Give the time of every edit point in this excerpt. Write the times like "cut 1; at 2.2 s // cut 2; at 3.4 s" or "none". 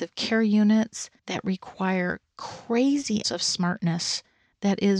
cut 1; at 1.2 s // cut 2; at 3.2 s